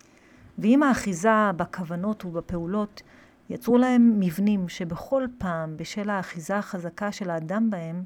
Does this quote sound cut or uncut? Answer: uncut